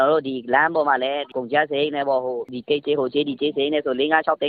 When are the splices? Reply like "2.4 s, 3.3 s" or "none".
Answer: none